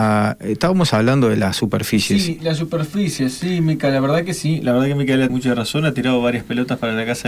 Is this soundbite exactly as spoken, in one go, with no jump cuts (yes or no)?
no